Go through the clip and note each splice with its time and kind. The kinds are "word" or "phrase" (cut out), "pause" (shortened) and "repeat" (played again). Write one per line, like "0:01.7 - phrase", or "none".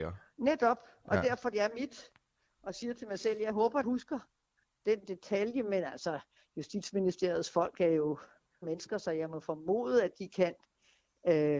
0:01.5 - word
0:03.8 - phrase
0:08.6 - word

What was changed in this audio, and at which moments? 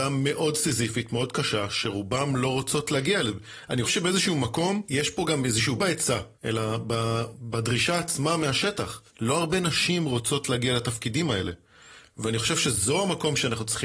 0:03.8 - word
0:05.8 - phrase
0:06.3 - pause
0:09.1 - pause

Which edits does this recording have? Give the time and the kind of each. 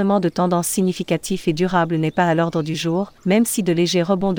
0:03.2 - pause

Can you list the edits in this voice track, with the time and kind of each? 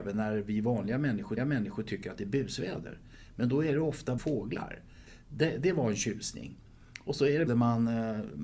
0:01.4 - repeat
0:04.2 - phrase
0:07.5 - phrase

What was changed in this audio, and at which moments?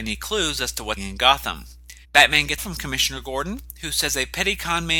0:01.0 - word
0:02.0 - pause
0:02.6 - phrase

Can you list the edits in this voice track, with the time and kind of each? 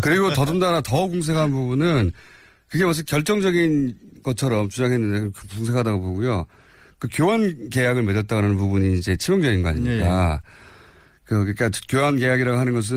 none

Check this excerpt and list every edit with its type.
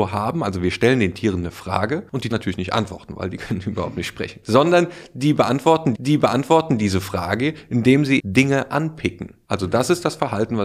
0:02.3 - phrase
0:05.9 - repeat
0:08.2 - word

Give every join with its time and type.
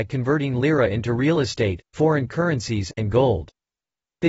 none

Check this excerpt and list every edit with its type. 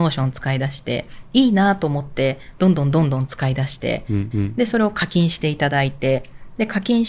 0:04.3 - repeat

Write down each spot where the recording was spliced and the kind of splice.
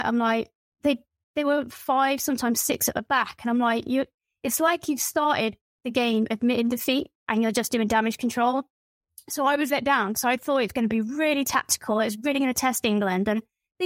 0:07.2 - pause
0:09.7 - word

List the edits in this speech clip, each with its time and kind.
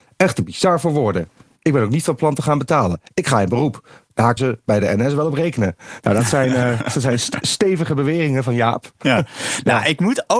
0:04.4 - word

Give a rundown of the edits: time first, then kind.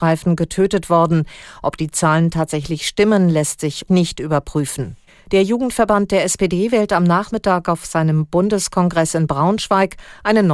0:03.9 - word
0:05.1 - pause

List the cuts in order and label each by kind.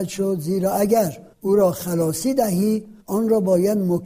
0:01.3 - pause
0:03.0 - pause

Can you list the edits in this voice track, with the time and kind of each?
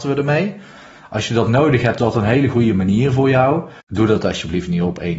0:02.0 - word
0:03.8 - pause

